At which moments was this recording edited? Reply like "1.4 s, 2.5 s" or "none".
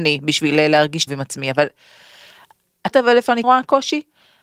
1.1 s, 2.9 s, 3.4 s